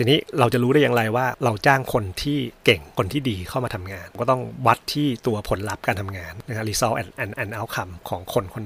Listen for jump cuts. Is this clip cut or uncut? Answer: cut